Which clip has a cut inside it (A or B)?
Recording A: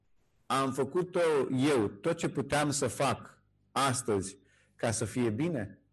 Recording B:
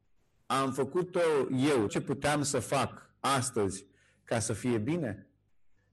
B